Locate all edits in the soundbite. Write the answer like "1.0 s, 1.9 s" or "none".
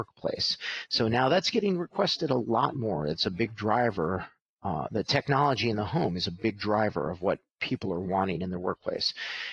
none